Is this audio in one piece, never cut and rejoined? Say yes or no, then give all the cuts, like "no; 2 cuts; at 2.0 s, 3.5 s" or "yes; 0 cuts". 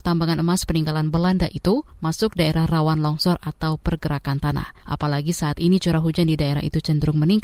no; 1 cut; at 4.8 s